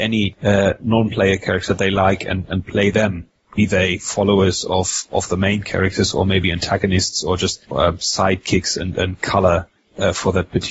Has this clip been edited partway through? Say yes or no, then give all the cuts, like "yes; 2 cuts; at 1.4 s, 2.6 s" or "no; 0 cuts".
yes; 1 cut; at 7.7 s